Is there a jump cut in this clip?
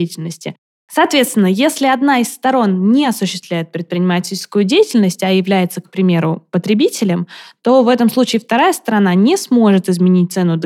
no; 0 cuts

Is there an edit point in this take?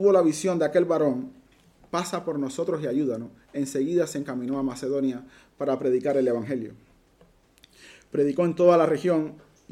no; 0 cuts

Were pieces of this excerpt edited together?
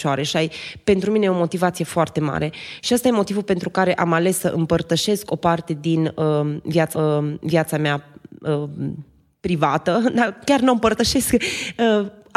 yes; 1 cut; at 6.9 s

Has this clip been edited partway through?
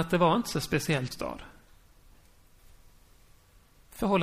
yes; 1 cut; at 1.1 s

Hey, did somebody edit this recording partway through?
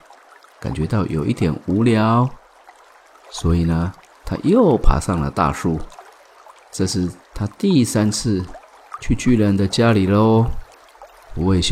no; 0 cuts

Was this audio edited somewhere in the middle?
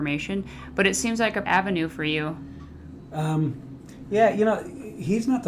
yes; 1 cut; at 1.4 s

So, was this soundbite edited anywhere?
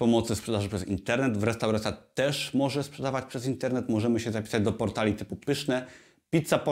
no; 0 cuts

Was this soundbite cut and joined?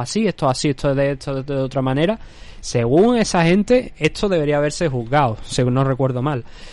no; 0 cuts

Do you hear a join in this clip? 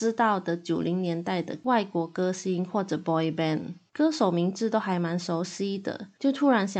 no; 0 cuts

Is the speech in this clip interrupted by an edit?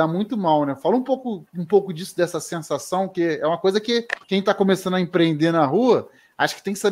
yes; 2 cuts; at 1.5 s, 4.2 s

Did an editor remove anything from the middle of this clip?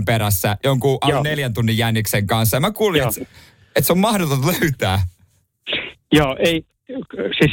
no; 0 cuts

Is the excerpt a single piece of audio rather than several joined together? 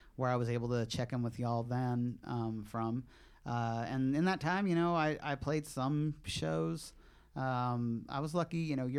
yes; 0 cuts

